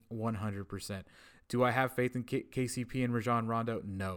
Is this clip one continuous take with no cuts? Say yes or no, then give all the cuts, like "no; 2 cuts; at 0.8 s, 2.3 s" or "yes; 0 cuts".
yes; 0 cuts